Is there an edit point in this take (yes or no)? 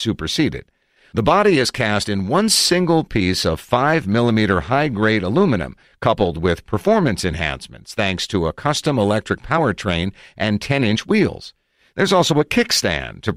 no